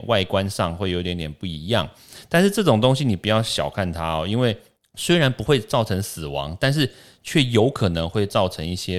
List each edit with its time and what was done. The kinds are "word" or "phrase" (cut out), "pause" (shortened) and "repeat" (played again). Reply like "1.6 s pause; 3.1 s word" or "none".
none